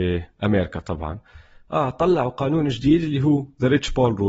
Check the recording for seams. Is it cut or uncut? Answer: uncut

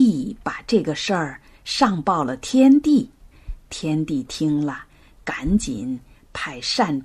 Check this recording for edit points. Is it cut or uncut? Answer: uncut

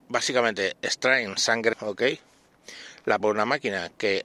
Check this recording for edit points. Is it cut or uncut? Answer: cut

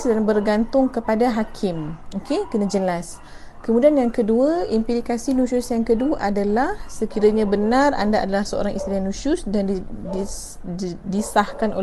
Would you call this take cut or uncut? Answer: uncut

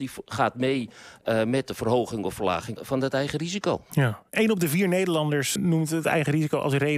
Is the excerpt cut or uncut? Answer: cut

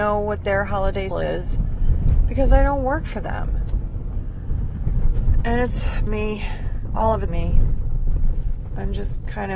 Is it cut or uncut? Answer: cut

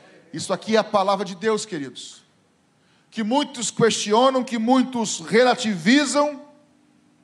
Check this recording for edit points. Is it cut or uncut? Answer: uncut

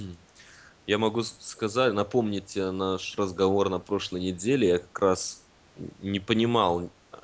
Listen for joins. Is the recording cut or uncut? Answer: uncut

